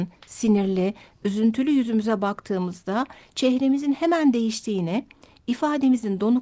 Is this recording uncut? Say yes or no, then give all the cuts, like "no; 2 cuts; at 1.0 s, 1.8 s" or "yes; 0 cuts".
yes; 0 cuts